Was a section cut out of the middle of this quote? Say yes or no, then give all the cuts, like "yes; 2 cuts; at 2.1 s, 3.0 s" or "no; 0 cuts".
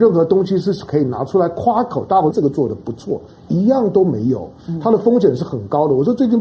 yes; 1 cut; at 2.3 s